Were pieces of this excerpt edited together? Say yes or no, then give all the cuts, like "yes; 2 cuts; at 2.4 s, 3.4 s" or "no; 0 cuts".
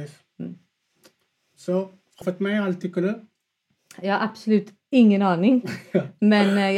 yes; 1 cut; at 2.2 s